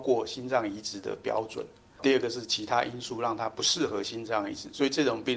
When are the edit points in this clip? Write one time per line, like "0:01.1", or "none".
0:02.0